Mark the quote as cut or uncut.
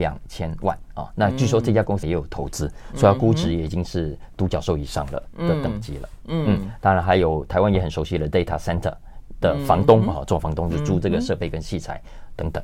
cut